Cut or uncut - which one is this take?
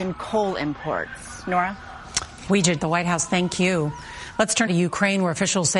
cut